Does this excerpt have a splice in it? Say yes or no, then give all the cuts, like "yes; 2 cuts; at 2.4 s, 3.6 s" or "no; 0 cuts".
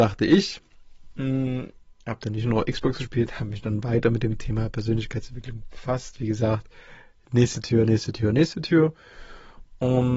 no; 0 cuts